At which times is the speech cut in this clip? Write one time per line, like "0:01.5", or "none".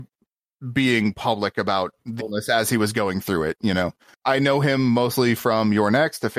0:02.2
0:04.2